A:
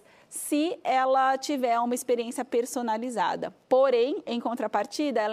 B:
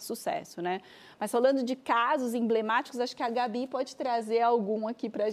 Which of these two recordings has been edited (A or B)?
A